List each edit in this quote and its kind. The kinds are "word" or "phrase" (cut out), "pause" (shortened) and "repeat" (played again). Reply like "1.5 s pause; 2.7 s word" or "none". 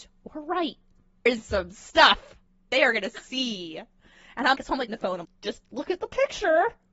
1.3 s word; 2.7 s word; 4.5 s word; 4.9 s word; 5.2 s word